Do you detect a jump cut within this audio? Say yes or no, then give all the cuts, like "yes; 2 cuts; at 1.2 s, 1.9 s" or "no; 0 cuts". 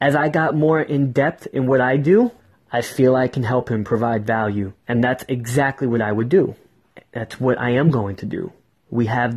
yes; 2 cuts; at 2.4 s, 4.8 s